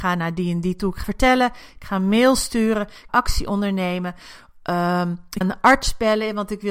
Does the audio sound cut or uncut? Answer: cut